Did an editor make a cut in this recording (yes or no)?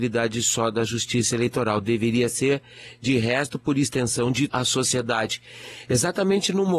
yes